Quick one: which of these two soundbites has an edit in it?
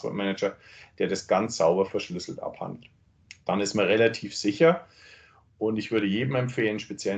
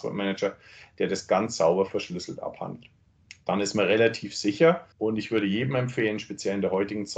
second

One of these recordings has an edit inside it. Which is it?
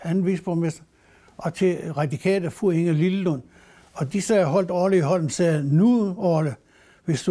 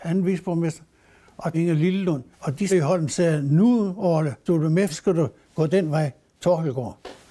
second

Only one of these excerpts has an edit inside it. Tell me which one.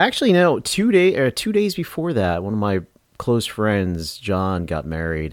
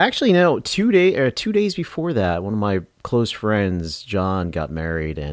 second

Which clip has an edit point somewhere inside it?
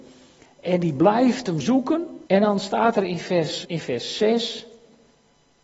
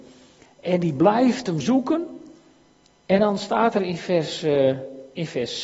first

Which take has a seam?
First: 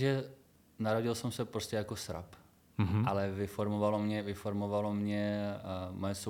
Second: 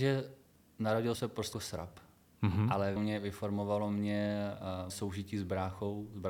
second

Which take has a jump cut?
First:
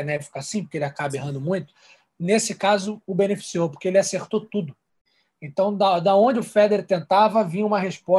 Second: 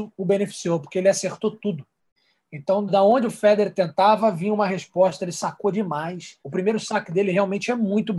second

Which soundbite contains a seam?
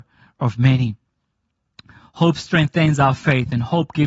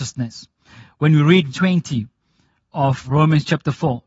second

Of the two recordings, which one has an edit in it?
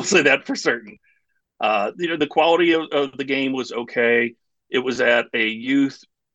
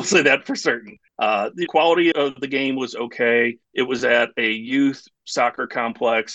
second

